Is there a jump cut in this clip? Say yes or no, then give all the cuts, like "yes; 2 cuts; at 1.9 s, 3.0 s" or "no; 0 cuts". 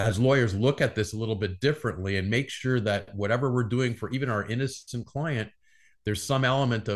no; 0 cuts